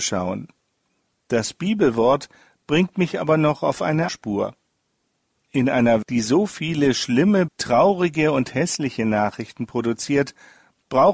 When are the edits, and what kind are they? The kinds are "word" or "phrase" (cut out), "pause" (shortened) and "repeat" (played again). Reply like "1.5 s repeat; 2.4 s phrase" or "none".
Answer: 4.1 s word; 6.0 s word; 7.5 s word